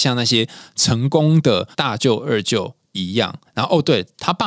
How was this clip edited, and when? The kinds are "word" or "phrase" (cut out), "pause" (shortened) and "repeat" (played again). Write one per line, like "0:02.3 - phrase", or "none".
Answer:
0:01.7 - pause
0:03.5 - pause